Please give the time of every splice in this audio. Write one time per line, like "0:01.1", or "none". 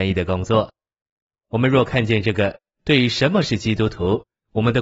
none